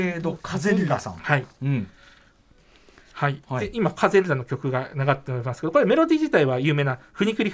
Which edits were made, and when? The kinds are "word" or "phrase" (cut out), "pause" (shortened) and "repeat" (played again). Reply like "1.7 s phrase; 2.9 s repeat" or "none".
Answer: none

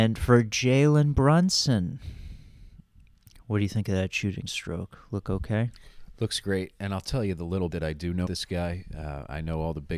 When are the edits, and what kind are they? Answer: 7.7 s word; 8.3 s word

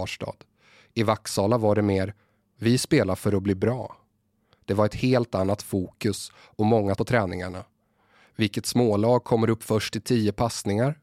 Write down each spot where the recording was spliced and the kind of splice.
7.0 s word

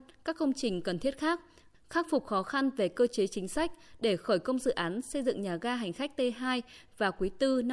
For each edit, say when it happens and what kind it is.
none

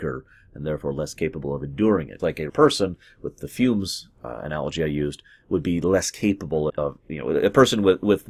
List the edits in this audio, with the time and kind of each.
2.2 s word; 2.5 s word; 6.7 s word

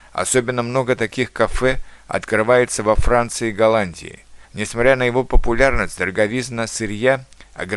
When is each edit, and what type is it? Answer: 4.4 s pause

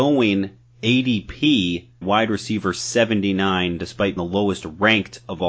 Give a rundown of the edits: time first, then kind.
2.0 s word; 4.2 s word

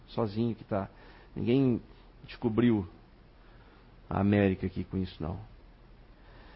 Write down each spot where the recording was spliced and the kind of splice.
none

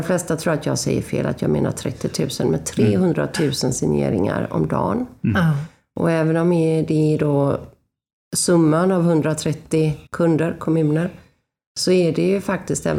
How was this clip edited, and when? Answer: 10.1 s pause

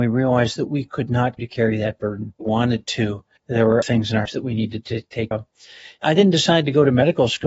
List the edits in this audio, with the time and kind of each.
1.4 s word; 2.4 s word; 3.4 s word; 3.8 s word; 4.2 s word; 5.3 s word

